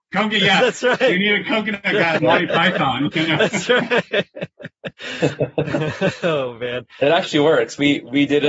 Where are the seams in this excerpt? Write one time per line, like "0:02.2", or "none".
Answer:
0:02.2
0:04.9